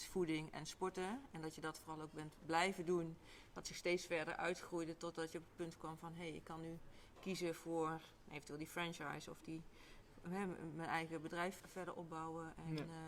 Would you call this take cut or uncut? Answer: cut